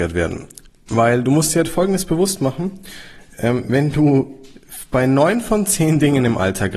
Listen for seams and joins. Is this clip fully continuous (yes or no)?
yes